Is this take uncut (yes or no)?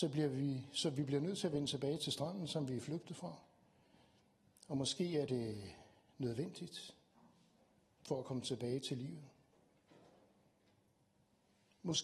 yes